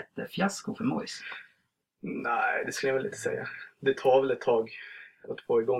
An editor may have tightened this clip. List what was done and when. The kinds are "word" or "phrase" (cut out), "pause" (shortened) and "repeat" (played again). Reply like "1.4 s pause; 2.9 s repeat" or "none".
none